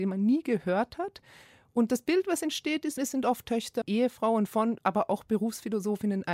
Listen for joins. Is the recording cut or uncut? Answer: cut